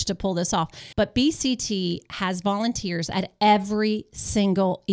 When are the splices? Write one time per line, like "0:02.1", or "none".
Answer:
0:00.9